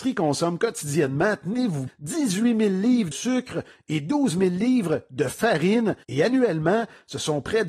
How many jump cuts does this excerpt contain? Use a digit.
3